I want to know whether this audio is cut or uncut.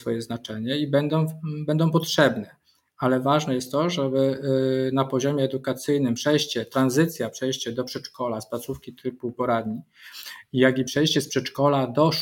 uncut